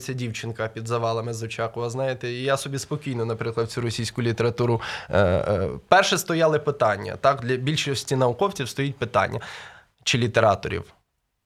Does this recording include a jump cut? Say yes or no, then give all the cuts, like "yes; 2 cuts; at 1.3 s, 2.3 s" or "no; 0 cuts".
no; 0 cuts